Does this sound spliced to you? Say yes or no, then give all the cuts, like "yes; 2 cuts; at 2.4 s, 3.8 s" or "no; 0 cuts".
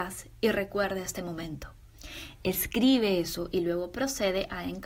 no; 0 cuts